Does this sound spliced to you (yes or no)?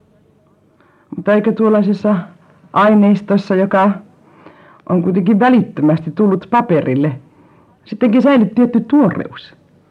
no